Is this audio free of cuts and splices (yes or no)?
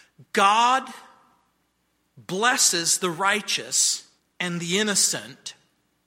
no